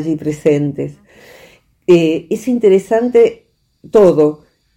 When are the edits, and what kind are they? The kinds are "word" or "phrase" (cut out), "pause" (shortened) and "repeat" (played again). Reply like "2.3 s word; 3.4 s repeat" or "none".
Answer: none